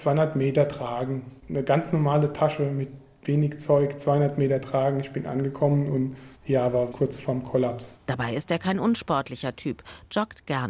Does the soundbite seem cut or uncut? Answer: cut